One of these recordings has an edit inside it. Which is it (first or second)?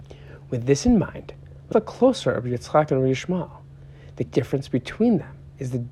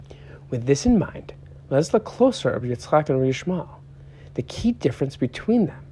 first